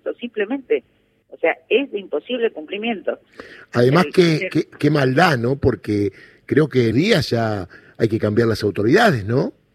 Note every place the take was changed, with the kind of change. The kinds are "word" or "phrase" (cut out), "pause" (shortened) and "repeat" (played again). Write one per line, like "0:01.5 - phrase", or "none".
0:06.9 - word

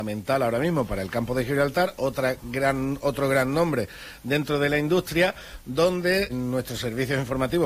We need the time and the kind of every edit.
0:06.3 - word

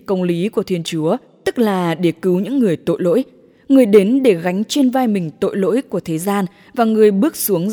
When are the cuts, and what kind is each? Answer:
none

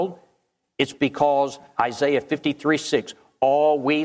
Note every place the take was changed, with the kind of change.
none

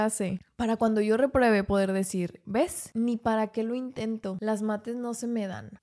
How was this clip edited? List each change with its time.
none

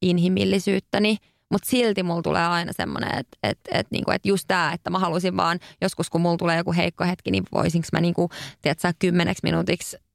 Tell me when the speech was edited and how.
none

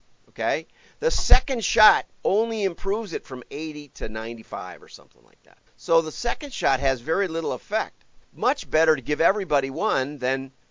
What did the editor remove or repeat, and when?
0:05.7 - pause
0:08.2 - pause

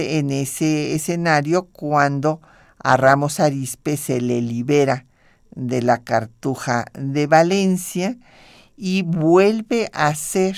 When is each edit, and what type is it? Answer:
none

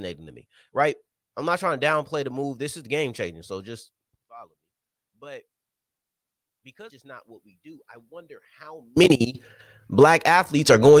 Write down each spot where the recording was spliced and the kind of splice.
0:06.9 - phrase

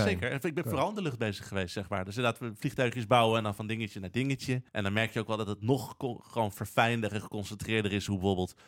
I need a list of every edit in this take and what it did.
0:04.7 - pause

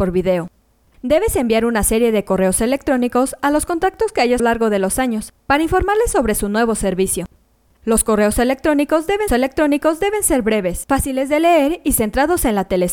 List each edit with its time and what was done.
0:04.4 - phrase
0:09.3 - repeat

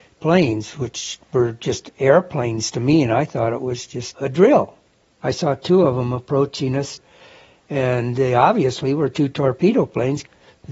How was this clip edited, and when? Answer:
none

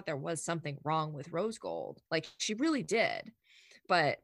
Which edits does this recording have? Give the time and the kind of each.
0:02.1 - pause

